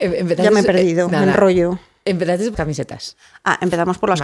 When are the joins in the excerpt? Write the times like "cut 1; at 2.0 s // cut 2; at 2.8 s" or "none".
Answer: cut 1; at 2.5 s